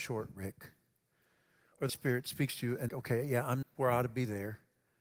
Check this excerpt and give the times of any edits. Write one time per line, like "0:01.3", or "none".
0:01.9
0:02.9
0:03.6